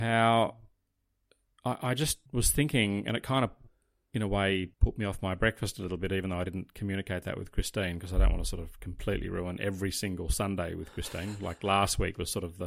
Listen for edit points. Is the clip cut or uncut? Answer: cut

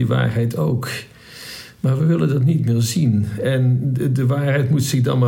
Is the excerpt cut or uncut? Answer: uncut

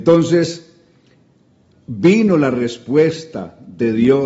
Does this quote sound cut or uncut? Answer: uncut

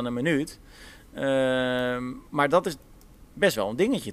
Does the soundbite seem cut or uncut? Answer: uncut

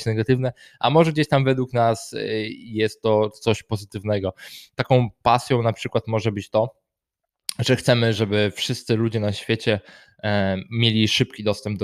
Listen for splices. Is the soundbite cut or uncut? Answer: uncut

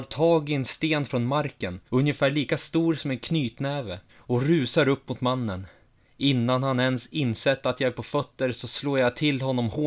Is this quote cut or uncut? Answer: cut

